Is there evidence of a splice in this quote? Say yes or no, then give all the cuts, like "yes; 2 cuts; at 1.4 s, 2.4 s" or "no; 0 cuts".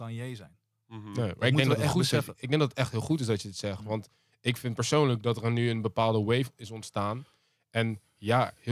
no; 0 cuts